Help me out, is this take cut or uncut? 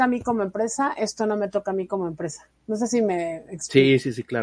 cut